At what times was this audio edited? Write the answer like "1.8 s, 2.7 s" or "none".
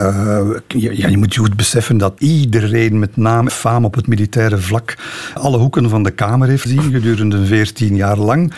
2.2 s, 3.5 s, 5.4 s, 6.7 s